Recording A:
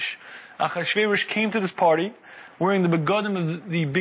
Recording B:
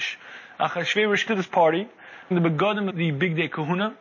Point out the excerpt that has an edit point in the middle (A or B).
B